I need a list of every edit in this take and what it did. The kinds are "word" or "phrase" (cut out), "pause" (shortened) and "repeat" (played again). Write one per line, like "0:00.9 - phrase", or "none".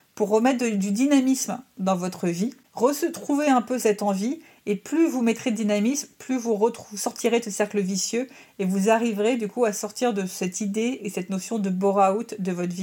none